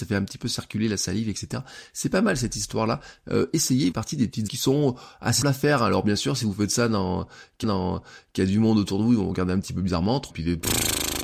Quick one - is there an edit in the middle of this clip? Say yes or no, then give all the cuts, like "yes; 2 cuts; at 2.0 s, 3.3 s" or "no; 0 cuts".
yes; 5 cuts; at 3.9 s, 4.5 s, 5.4 s, 7.6 s, 10.3 s